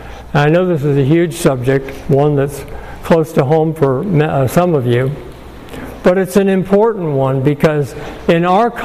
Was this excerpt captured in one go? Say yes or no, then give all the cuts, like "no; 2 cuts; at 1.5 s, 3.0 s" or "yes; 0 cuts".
yes; 0 cuts